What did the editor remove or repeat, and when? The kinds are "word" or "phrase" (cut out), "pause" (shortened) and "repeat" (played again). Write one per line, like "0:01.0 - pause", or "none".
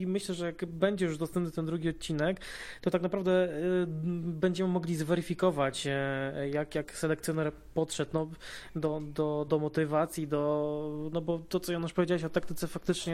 0:09.5 - word